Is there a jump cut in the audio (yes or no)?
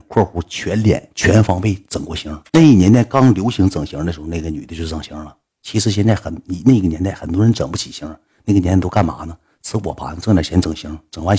no